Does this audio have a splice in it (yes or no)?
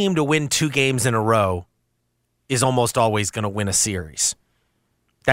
no